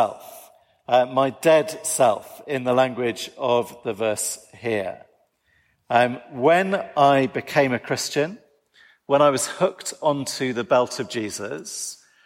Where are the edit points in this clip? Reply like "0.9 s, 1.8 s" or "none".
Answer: none